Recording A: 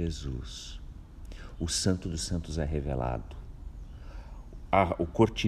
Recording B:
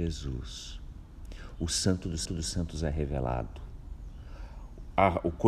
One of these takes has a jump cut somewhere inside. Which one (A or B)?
B